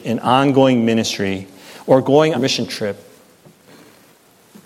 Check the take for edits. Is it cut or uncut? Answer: cut